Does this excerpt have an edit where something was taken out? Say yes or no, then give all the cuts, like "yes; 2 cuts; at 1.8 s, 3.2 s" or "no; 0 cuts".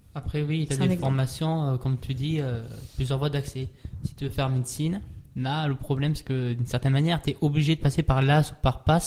no; 0 cuts